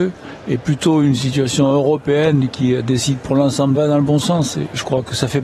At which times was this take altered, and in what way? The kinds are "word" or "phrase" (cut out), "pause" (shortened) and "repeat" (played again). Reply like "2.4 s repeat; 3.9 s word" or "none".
3.7 s phrase